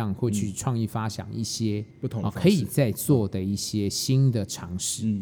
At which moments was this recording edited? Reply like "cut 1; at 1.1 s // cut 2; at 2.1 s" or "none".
cut 1; at 1.9 s